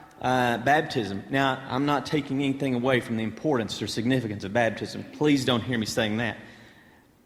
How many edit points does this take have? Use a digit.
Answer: 0